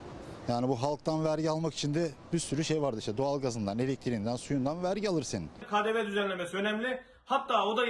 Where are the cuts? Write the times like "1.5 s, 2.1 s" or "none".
none